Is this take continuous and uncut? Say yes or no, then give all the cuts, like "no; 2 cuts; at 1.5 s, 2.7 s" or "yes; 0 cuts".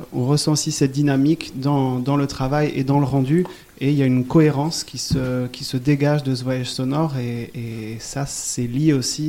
yes; 0 cuts